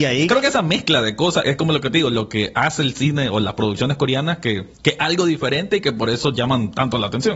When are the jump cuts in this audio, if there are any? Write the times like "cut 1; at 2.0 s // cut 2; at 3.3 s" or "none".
cut 1; at 4.7 s

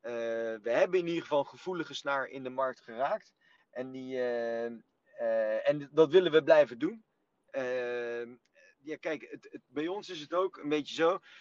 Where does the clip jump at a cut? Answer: none

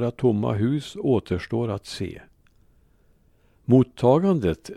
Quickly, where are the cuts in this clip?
none

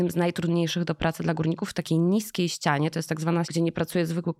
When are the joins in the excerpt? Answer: cut 1; at 3.4 s

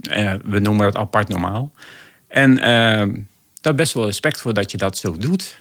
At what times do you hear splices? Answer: none

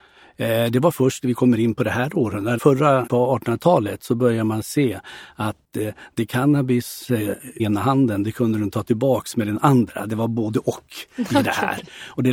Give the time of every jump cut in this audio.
cut 1; at 2.6 s // cut 2; at 3.1 s // cut 3; at 7.6 s

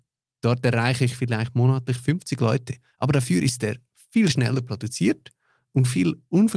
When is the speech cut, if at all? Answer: none

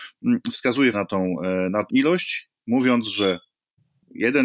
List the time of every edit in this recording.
cut 1; at 0.9 s // cut 2; at 1.9 s

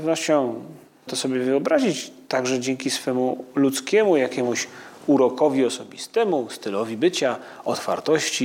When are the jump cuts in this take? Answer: cut 1; at 1.1 s

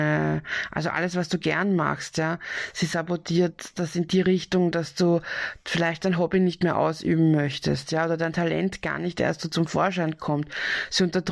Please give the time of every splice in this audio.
none

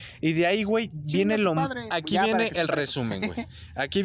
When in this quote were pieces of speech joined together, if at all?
none

